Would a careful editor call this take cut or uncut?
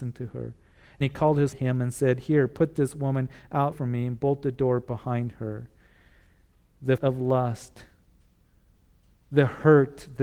cut